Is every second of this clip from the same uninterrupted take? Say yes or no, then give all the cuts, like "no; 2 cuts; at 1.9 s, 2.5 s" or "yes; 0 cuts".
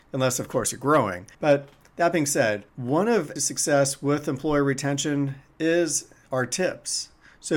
no; 3 cuts; at 1.3 s, 2.7 s, 3.4 s